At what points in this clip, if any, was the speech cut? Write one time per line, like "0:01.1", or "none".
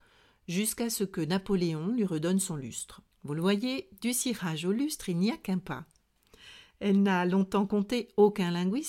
0:03.1